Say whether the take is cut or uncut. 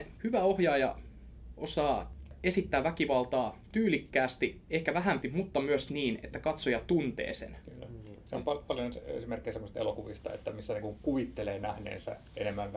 cut